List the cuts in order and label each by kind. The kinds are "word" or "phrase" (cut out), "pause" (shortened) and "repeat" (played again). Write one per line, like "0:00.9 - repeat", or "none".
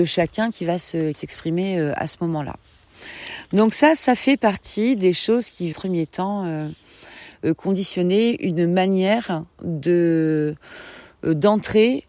0:01.1 - phrase
0:05.7 - phrase